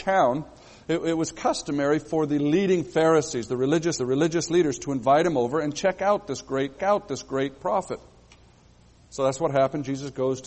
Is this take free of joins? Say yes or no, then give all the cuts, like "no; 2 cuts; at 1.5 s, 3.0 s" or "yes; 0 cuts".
no; 2 cuts; at 4.0 s, 6.8 s